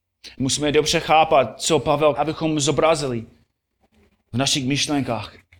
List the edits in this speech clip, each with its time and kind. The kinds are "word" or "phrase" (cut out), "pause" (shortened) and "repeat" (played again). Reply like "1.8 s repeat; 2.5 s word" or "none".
2.1 s word